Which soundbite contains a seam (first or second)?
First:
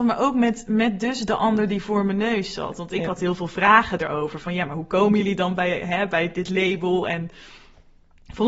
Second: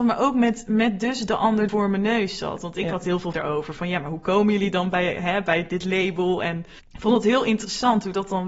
second